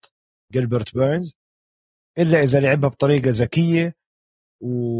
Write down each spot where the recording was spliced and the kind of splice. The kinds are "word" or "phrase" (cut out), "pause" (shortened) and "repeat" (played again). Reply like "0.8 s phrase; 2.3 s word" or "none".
none